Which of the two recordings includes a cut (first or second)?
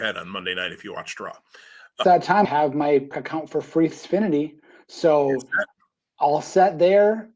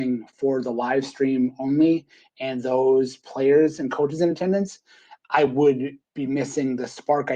first